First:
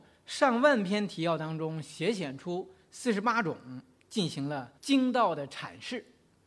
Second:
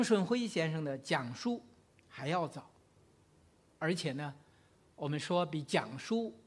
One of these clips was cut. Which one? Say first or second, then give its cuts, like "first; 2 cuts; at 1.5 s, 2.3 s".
first; 1 cut; at 4.8 s